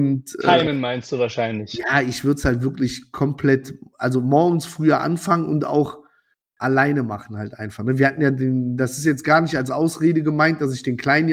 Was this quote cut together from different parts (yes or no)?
no